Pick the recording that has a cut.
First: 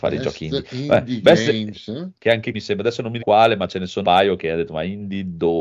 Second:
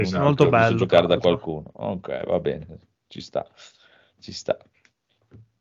first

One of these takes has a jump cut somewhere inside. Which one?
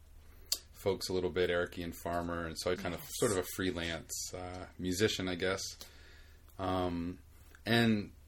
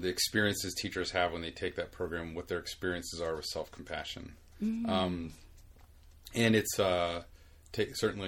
first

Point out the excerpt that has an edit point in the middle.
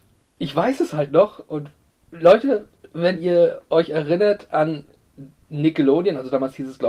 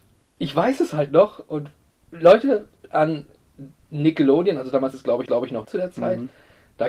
second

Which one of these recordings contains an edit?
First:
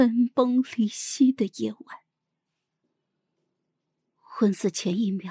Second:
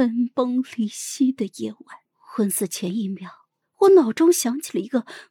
second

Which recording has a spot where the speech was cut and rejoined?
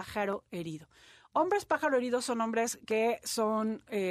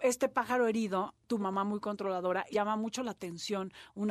second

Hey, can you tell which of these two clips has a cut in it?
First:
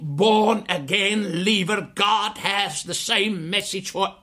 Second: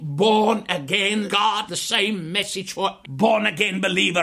second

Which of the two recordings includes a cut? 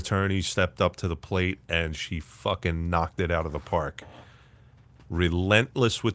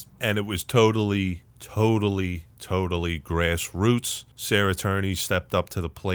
second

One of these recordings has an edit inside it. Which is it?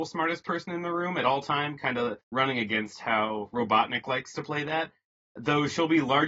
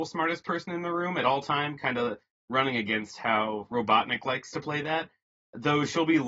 first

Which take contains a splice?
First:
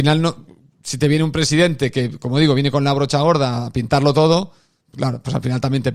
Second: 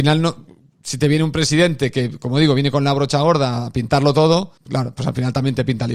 second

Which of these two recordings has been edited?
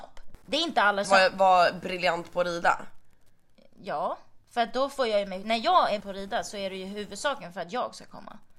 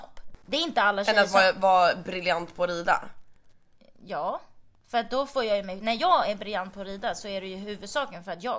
first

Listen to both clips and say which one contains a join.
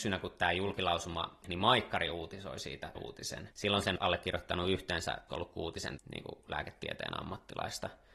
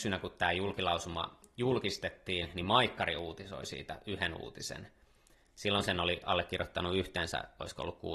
first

